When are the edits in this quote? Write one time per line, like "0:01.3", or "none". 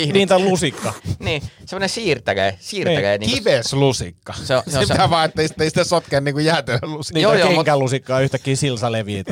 0:05.5